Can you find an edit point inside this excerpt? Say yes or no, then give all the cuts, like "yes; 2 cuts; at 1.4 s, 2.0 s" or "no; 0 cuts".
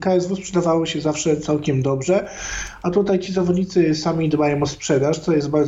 no; 0 cuts